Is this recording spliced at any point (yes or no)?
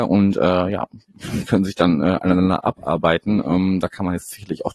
no